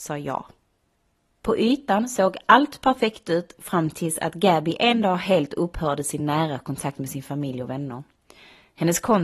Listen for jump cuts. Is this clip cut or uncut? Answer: uncut